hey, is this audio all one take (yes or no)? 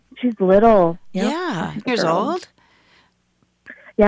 no